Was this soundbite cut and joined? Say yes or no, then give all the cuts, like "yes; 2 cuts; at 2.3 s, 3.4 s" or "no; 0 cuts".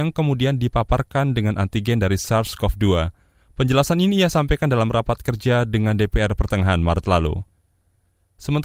no; 0 cuts